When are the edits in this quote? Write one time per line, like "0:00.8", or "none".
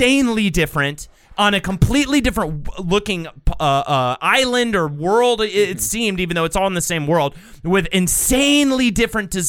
none